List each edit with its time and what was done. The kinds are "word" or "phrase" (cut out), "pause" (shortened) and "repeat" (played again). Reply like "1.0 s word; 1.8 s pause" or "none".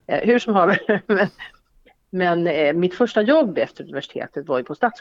none